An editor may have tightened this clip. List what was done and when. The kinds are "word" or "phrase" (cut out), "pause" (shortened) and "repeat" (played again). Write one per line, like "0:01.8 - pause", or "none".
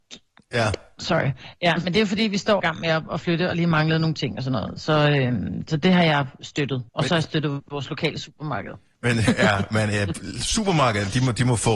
0:02.6 - word
0:06.9 - pause

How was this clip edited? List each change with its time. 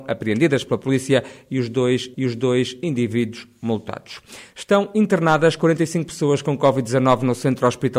0:02.1 - repeat

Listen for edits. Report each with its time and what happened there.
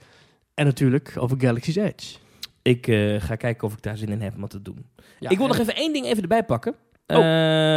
none

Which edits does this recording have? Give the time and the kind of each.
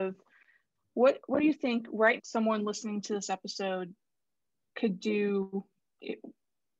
0:02.2 - word

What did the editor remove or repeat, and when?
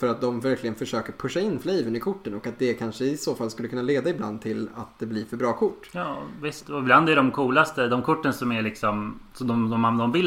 none

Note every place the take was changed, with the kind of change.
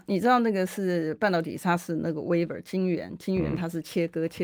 none

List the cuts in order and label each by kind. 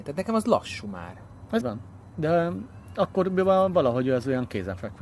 0:01.6 - word

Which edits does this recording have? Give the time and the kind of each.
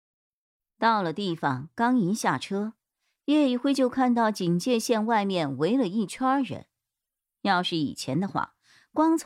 none

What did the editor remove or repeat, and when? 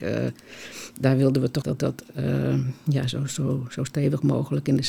0:01.6 - phrase

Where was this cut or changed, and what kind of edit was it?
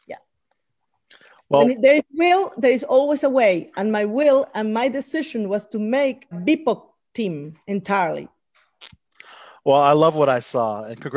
0:06.3 - phrase

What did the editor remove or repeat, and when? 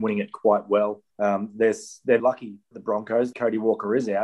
0:01.1 - pause
0:02.2 - word
0:02.7 - word
0:03.3 - word

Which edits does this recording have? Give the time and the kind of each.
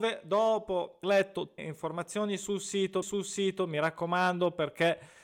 0:01.0 - word
0:01.6 - phrase
0:03.0 - repeat

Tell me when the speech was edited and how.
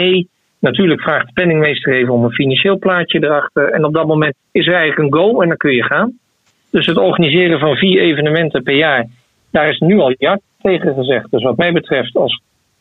none

